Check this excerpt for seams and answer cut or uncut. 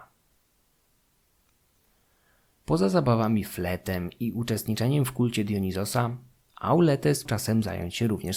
cut